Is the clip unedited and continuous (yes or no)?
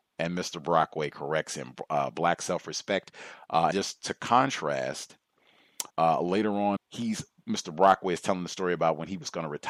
no